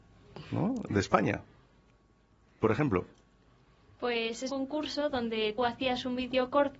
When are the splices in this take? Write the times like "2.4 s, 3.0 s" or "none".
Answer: 4.5 s, 5.6 s